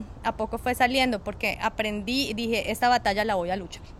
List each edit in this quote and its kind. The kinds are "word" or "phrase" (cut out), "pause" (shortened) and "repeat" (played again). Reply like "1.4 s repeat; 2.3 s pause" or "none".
none

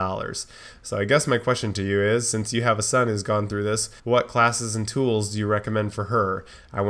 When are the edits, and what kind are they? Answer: 4.0 s pause

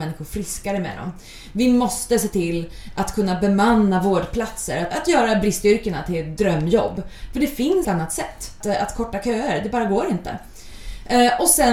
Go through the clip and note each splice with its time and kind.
4.9 s word; 7.8 s word; 8.6 s word

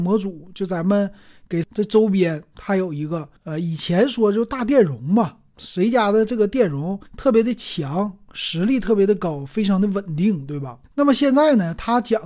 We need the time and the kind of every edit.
1.6 s word; 3.4 s pause; 7.1 s pause; 10.9 s pause

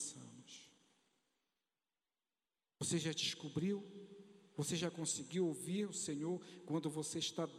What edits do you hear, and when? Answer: none

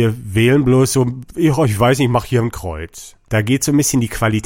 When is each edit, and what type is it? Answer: none

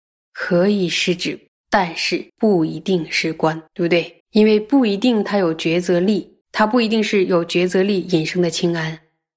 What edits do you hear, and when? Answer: 1.5 s pause; 2.3 s pause; 3.7 s pause; 4.2 s pause; 6.4 s pause

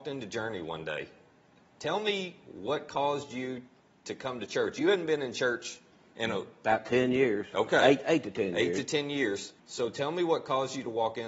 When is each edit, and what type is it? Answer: 9.6 s pause

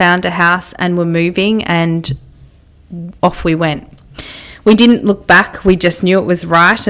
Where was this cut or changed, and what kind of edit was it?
none

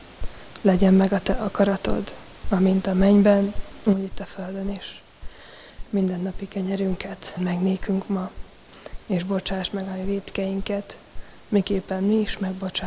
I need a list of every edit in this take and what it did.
7.4 s word

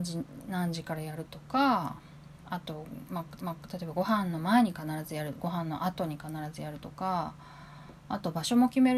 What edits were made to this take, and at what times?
3.4 s repeat

